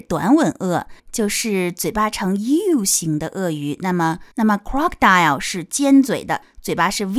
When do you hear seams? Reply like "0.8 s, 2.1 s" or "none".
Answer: 1.0 s, 4.3 s